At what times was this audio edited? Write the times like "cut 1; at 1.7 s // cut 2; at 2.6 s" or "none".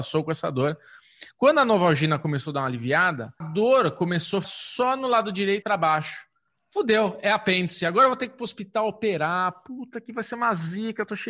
cut 1; at 3.4 s // cut 2; at 4.4 s // cut 3; at 5.6 s